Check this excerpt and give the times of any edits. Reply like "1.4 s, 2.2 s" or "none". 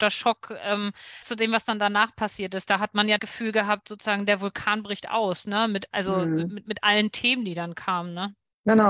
1.2 s, 3.2 s